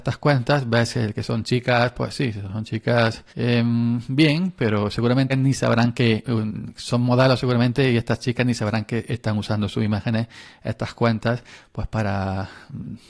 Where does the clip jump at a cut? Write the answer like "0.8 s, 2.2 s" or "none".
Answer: 3.3 s, 5.3 s